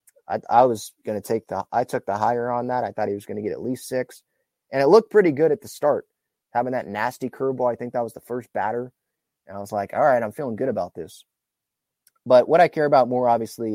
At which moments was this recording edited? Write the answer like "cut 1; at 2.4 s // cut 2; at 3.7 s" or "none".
none